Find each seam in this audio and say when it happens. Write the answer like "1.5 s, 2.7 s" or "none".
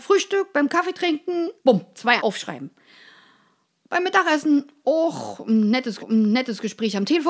1.6 s, 2.2 s, 6.0 s